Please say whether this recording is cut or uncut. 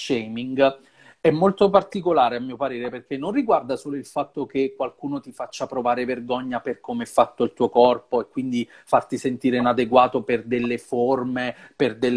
uncut